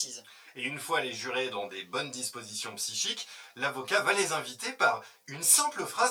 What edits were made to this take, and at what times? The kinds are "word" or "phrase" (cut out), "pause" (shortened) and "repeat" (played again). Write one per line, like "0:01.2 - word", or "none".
none